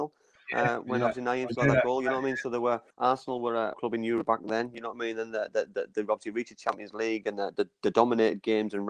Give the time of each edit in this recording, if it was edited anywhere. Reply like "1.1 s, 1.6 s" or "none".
2.9 s, 3.7 s